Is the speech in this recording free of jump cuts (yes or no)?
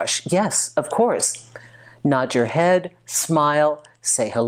yes